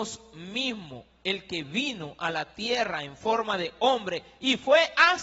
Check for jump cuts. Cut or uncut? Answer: uncut